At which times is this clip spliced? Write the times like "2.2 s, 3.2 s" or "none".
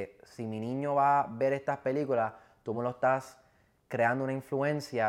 none